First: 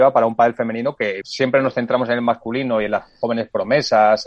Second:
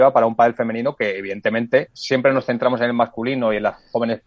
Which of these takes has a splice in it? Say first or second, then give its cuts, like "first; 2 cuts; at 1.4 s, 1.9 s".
first; 1 cut; at 1.2 s